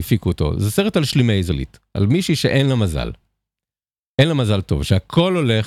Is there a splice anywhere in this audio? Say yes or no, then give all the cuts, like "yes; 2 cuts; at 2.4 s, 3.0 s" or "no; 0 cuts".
no; 0 cuts